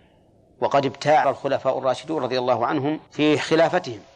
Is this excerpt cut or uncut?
cut